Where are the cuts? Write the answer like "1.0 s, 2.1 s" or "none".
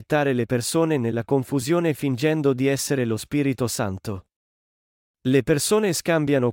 none